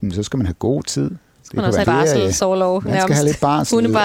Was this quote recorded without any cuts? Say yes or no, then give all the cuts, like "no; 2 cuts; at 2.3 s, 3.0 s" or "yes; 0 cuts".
no; 1 cut; at 1.8 s